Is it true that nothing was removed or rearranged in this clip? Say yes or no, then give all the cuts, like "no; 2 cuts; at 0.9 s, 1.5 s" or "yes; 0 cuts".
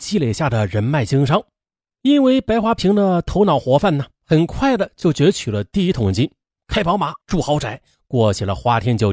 no; 2 cuts; at 1.8 s, 7.2 s